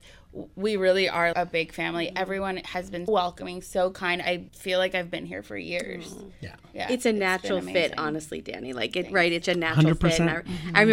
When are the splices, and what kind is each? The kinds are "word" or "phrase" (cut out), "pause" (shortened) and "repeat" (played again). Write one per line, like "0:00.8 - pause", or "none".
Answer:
0:01.3 - word
0:03.1 - word
0:04.5 - pause
0:09.4 - phrase